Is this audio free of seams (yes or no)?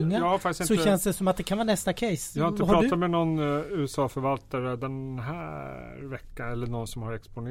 yes